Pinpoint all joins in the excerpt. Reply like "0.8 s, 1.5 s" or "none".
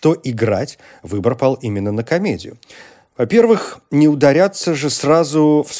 none